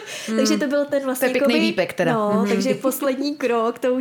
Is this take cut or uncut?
uncut